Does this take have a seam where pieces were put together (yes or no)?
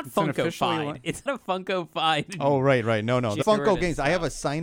yes